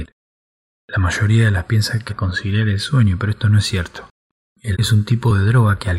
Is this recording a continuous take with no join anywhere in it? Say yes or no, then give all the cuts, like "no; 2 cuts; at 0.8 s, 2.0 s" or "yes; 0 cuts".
no; 3 cuts; at 1.6 s, 2.1 s, 4.7 s